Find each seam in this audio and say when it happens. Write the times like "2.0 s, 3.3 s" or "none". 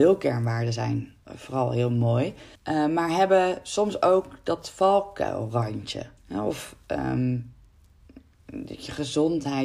1.2 s, 2.6 s, 6.2 s